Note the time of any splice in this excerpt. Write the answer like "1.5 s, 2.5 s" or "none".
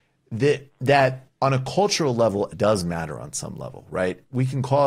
1.3 s, 2.5 s